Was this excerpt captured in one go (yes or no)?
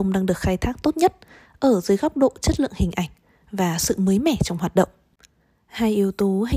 yes